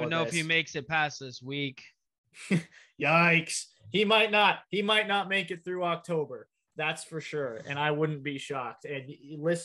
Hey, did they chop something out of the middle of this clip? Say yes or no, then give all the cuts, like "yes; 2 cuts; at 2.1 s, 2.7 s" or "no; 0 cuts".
no; 0 cuts